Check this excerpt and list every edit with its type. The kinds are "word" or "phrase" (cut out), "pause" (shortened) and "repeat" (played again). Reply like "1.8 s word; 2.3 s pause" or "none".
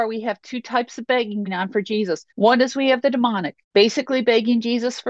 1.5 s word; 2.3 s pause; 3.6 s pause